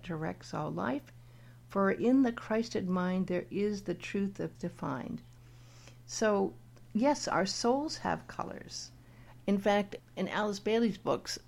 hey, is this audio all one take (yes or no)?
no